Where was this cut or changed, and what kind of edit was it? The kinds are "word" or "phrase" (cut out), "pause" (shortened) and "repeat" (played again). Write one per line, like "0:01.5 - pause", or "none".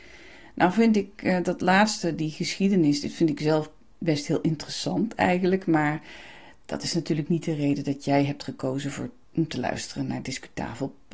none